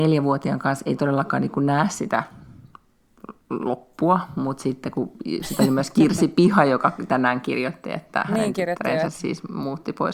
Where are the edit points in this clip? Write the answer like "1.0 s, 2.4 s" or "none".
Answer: 3.4 s